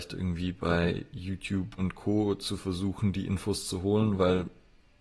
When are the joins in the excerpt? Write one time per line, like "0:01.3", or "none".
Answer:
0:01.8